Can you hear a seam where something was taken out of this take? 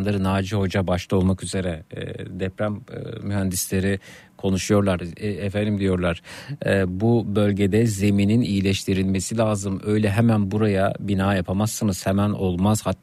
no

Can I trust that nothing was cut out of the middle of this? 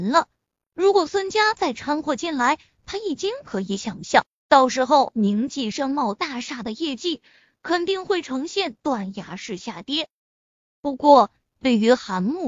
yes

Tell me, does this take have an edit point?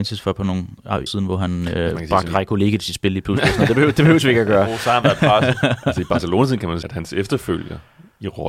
yes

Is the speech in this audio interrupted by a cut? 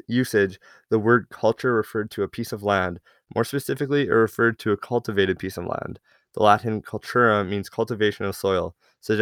no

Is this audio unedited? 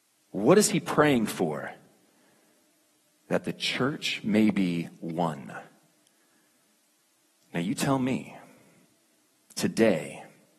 yes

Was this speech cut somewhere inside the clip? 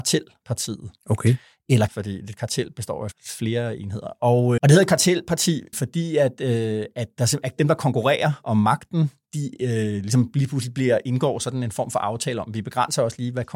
yes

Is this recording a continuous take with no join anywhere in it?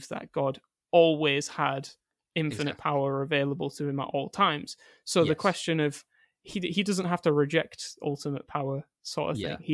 yes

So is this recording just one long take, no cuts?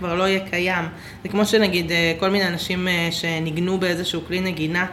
yes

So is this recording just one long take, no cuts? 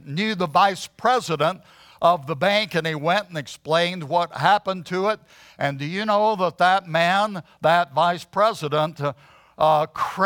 yes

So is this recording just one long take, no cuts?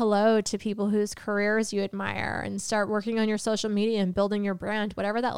yes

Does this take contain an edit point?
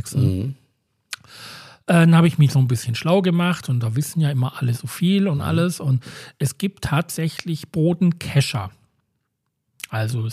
no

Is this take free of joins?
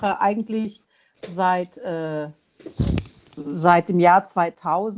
yes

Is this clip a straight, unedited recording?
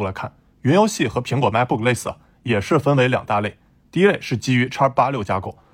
yes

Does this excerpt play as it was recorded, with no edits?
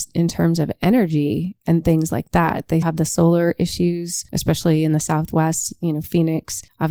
no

